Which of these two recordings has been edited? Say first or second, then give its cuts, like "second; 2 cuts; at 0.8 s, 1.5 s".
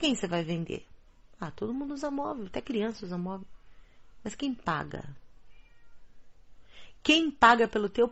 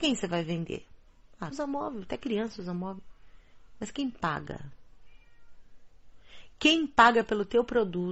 second; 1 cut; at 1.5 s